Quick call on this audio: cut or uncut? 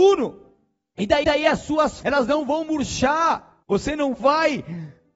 cut